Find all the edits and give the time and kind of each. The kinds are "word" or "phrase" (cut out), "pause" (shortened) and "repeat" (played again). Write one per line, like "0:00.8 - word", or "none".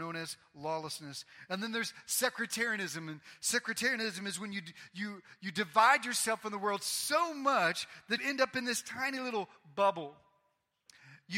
0:08.2 - word